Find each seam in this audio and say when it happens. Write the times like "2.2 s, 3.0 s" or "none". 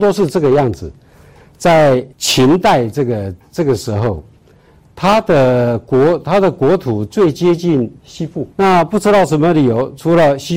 2.1 s, 8.0 s, 8.5 s